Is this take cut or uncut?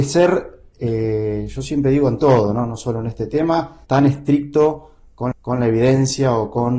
cut